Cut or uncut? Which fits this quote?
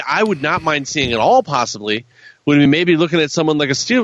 uncut